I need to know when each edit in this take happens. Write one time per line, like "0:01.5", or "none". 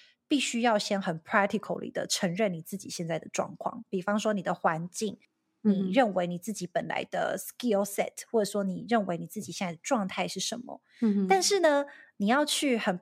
none